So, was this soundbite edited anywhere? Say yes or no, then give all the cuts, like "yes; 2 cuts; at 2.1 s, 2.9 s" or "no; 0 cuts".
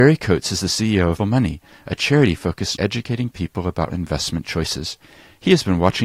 yes; 3 cuts; at 1.2 s, 2.8 s, 3.9 s